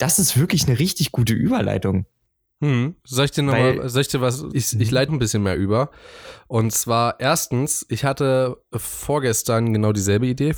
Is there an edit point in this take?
yes; 2 cuts; at 4.5 s, 5.1 s

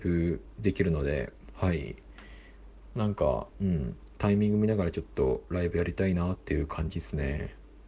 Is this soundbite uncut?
no; 1 cut; at 3.5 s

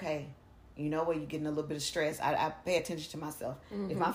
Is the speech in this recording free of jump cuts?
yes; 0 cuts

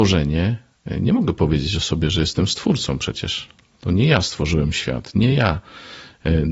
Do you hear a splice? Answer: no; 0 cuts

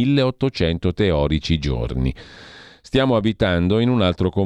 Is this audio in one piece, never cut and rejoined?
yes; 0 cuts

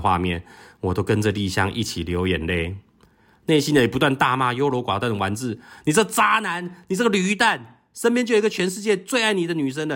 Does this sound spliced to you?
no; 0 cuts

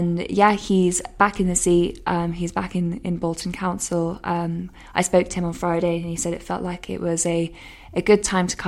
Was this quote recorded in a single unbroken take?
yes; 0 cuts

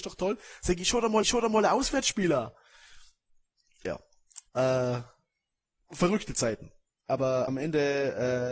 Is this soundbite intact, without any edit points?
no; 3 cuts; at 1.2 s, 4.5 s, 7.5 s

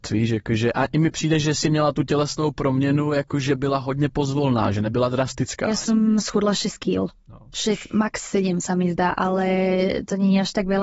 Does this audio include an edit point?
no; 0 cuts

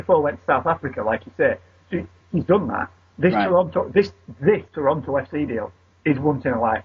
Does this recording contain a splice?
yes; 1 cut; at 4.7 s

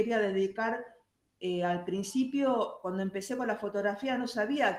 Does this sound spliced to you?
no; 0 cuts

